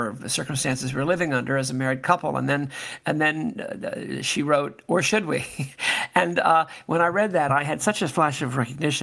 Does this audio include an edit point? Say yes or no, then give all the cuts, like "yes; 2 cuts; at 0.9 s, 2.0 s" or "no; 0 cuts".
no; 0 cuts